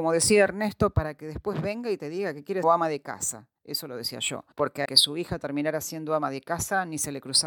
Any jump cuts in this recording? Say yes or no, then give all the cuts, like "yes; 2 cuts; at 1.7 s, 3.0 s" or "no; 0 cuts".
yes; 4 cuts; at 2.6 s, 3.6 s, 4.5 s, 4.8 s